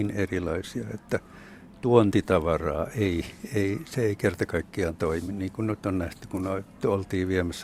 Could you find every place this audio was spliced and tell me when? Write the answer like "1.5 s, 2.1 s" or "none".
none

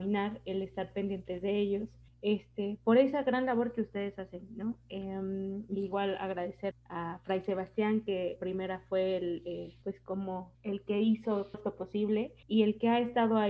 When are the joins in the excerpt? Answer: 2.1 s, 6.7 s, 8.4 s, 9.8 s, 10.5 s, 11.5 s, 12.4 s

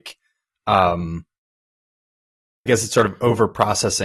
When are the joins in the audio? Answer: 2.7 s

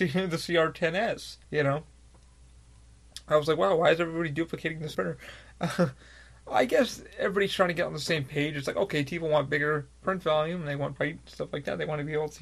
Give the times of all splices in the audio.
1.4 s, 4.9 s, 11.0 s

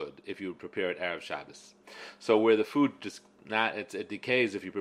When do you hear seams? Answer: none

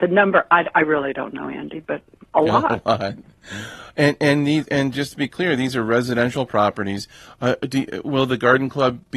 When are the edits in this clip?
none

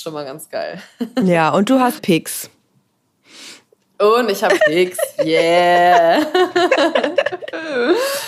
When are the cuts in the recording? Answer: 2.0 s, 4.6 s

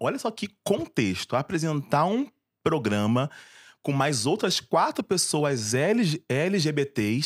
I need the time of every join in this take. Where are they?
none

